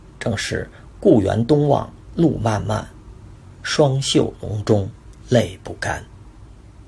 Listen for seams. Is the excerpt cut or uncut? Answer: cut